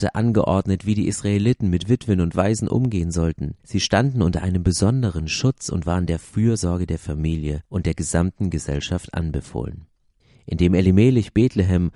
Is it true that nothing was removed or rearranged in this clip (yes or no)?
no